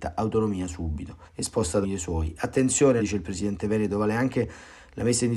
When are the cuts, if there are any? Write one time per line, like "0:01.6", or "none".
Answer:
0:01.3
0:01.8
0:03.0

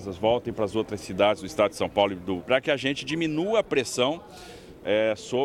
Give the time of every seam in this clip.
0:02.4

